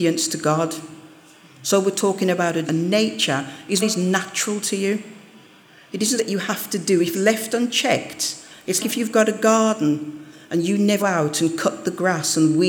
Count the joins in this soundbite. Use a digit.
6